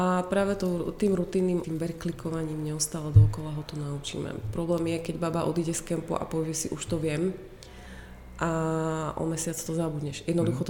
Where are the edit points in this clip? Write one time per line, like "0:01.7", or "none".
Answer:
0:01.6